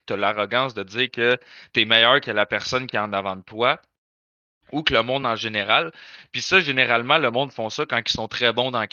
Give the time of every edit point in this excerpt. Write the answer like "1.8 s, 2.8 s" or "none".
none